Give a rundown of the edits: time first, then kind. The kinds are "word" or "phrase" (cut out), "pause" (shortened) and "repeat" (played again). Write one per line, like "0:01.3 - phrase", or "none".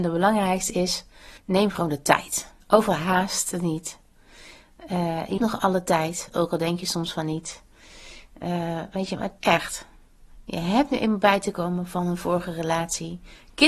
0:01.4 - pause
0:02.6 - pause
0:05.4 - word
0:09.4 - phrase